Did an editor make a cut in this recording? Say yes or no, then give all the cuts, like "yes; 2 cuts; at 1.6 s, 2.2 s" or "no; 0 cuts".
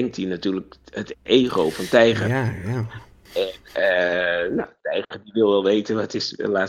no; 0 cuts